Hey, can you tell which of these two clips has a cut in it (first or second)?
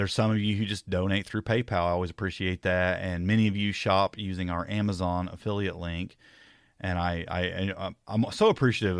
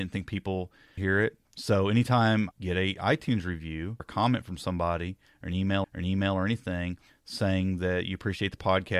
second